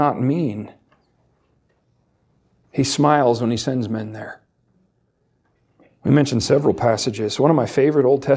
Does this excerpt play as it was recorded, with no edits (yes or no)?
yes